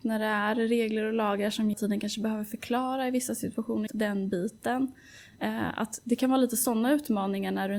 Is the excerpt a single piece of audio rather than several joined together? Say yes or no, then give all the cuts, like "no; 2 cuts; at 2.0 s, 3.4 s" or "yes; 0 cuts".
no; 2 cuts; at 1.7 s, 3.9 s